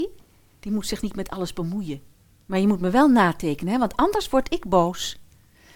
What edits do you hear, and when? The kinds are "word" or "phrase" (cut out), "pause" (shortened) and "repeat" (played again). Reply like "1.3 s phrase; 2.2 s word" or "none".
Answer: 2.2 s pause

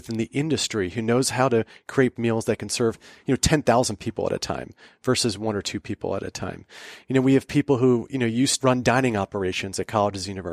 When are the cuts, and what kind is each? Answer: 2.2 s word; 8.6 s word

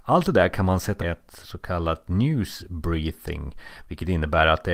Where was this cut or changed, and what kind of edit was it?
1.0 s phrase; 1.4 s word

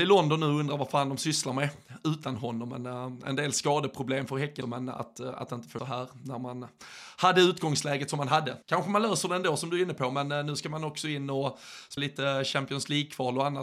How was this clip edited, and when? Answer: 4.6 s word; 5.8 s phrase; 8.6 s pause; 12.0 s word

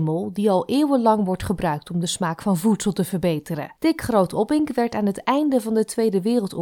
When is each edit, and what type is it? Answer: 3.8 s pause

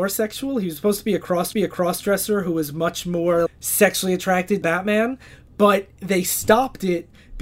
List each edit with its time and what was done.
1.5 s repeat; 3.5 s word; 4.6 s word

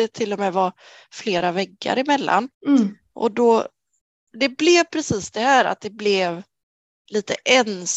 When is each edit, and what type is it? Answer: 2.5 s pause

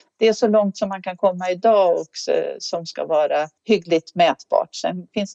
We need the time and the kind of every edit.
3.6 s pause

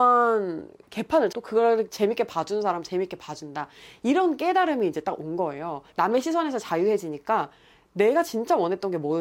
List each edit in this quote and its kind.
1.3 s word; 5.9 s pause

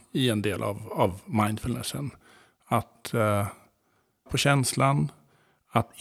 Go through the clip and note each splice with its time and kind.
4.3 s word

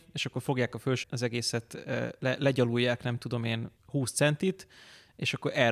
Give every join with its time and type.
1.0 s word

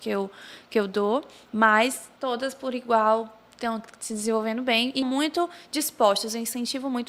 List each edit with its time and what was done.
2.2 s pause; 5.0 s phrase

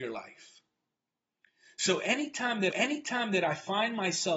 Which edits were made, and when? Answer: 2.7 s repeat

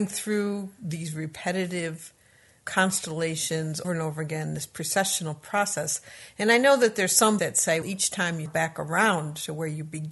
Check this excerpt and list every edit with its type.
3.8 s word; 7.4 s word; 7.8 s word; 8.5 s word

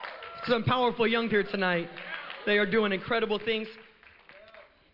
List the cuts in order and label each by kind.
1.3 s word

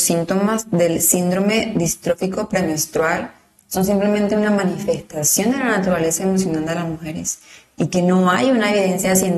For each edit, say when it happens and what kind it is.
none

